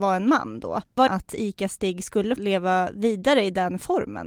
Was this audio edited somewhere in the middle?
yes; 2 cuts; at 1.1 s, 2.4 s

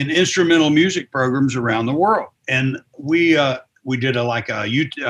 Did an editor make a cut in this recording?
yes; 1 cut; at 2.4 s

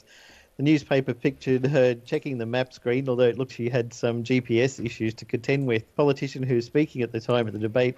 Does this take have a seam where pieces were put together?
yes; 2 cuts; at 3.5 s, 5.9 s

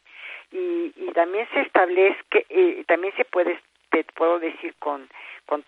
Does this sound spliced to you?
no; 0 cuts

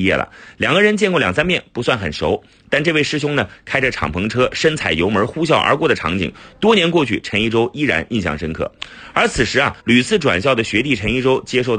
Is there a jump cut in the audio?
yes; 1 cut; at 9.8 s

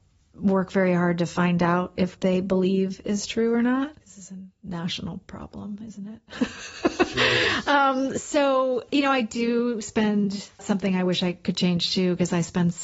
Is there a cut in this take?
yes; 4 cuts; at 2.1 s, 4.0 s, 8.9 s, 10.6 s

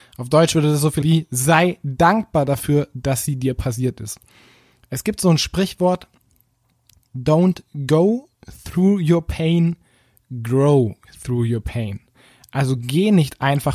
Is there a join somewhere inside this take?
yes; 1 cut; at 1.0 s

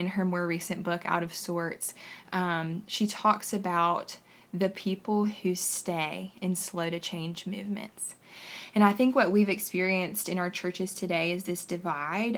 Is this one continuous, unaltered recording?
yes; 0 cuts

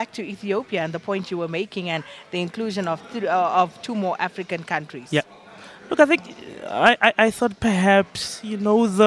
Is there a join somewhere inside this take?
no; 0 cuts

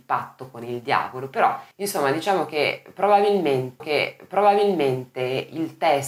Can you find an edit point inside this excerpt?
yes; 2 cuts; at 1.7 s, 3.8 s

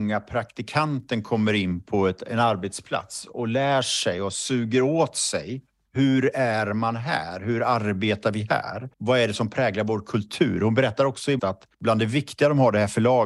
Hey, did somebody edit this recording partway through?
yes; 4 cuts; at 5.8 s, 8.9 s, 11.4 s, 11.7 s

